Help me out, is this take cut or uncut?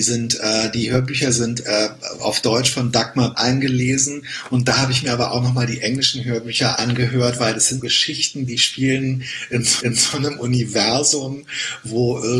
cut